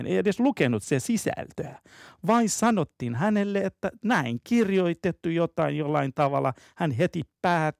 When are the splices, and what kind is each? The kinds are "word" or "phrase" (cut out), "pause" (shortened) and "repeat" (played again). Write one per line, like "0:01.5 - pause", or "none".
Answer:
none